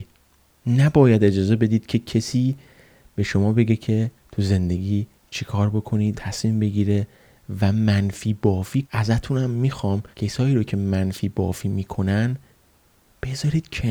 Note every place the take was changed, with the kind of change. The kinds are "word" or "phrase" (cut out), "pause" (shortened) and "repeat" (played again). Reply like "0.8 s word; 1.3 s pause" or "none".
6.1 s phrase; 8.8 s word; 10.1 s pause